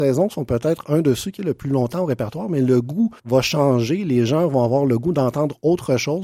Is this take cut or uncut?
cut